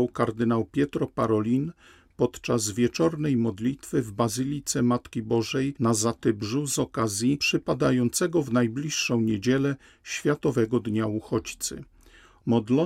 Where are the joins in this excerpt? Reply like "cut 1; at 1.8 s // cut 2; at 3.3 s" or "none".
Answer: none